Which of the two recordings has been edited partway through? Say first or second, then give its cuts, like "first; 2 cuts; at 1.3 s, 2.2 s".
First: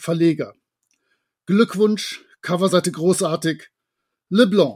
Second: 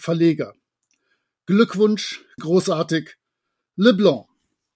second; 1 cut; at 2.4 s